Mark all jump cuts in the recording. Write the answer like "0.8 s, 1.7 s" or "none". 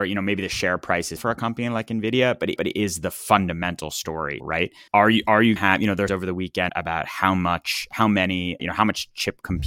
1.2 s, 2.6 s, 4.4 s, 4.9 s, 5.6 s, 6.1 s, 6.7 s, 8.6 s